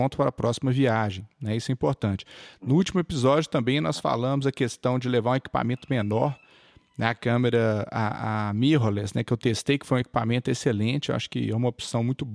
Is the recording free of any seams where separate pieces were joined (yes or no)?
yes